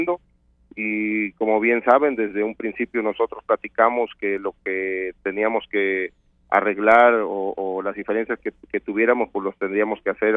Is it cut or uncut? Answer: uncut